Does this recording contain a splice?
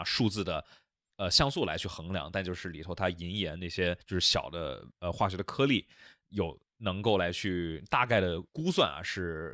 yes; 4 cuts; at 4.0 s, 4.9 s, 6.7 s, 8.5 s

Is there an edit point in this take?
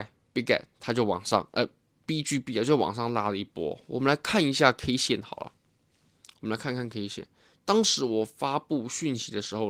no; 0 cuts

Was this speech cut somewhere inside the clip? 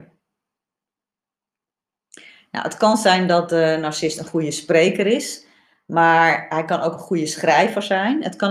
no; 0 cuts

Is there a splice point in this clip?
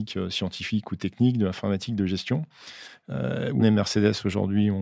yes; 1 cut; at 3.6 s

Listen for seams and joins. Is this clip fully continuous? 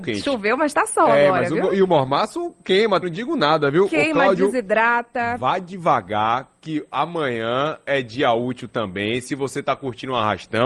no; 1 cut; at 3.0 s

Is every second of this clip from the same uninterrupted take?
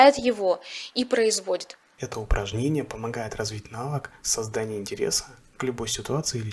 yes; 0 cuts

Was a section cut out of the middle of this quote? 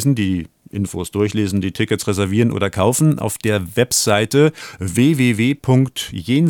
no; 0 cuts

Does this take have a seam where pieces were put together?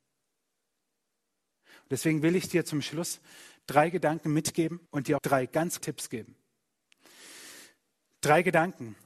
yes; 3 cuts; at 4.9 s, 5.2 s, 5.8 s

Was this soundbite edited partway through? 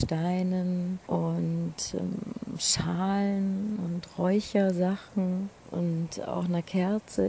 yes; 2 cuts; at 1.0 s, 5.6 s

